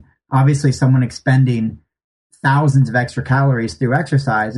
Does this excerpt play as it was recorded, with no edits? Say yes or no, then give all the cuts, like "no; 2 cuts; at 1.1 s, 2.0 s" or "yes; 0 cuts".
yes; 0 cuts